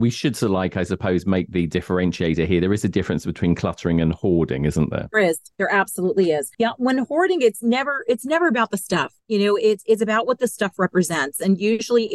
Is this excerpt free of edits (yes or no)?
yes